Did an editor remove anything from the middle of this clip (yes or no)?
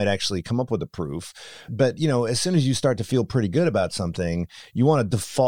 yes